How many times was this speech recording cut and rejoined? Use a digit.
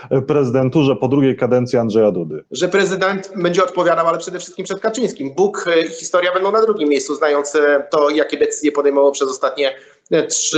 1